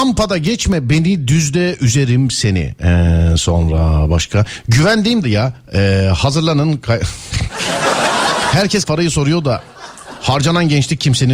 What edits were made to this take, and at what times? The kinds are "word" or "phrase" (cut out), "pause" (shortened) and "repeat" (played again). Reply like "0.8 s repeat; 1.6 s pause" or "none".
5.2 s phrase; 8.8 s word